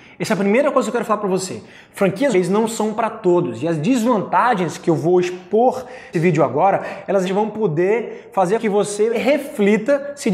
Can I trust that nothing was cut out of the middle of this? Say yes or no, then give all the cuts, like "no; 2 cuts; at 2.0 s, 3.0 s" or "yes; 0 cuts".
no; 4 cuts; at 2.3 s, 6.1 s, 7.2 s, 8.6 s